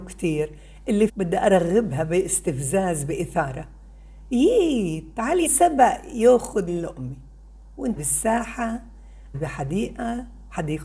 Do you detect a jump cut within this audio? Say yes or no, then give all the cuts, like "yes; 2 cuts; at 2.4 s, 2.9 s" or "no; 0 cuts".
yes; 5 cuts; at 1.1 s, 5.4 s, 6.7 s, 8.0 s, 9.3 s